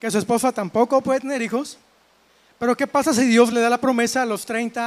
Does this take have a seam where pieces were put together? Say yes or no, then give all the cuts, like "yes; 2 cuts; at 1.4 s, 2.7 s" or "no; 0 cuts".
no; 0 cuts